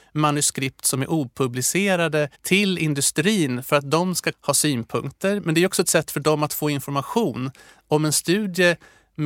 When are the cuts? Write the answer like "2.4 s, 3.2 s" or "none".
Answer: 2.3 s, 4.3 s